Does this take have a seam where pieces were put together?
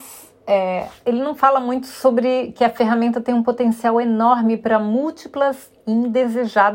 no; 0 cuts

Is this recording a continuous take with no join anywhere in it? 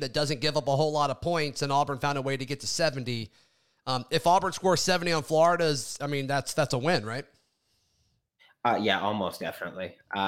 yes; 0 cuts

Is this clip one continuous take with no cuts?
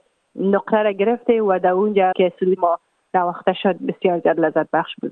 no; 2 cuts; at 2.1 s, 2.6 s

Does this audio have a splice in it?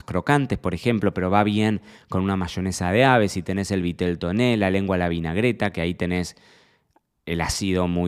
no; 0 cuts

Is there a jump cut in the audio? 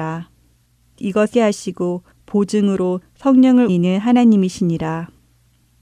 yes; 3 cuts; at 1.0 s, 1.3 s, 3.7 s

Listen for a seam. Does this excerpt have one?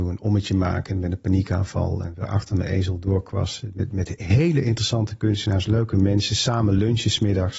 no; 0 cuts

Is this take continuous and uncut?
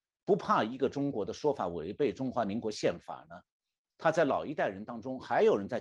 yes; 0 cuts

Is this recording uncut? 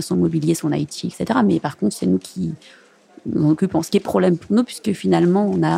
no; 1 cut; at 4.1 s

